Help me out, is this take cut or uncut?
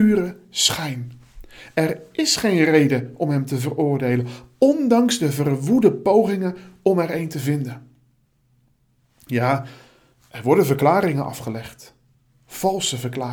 uncut